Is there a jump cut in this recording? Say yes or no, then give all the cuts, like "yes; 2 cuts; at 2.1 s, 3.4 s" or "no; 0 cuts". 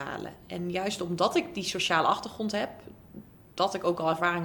no; 0 cuts